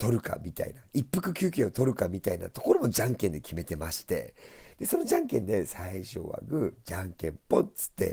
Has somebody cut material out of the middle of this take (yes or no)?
no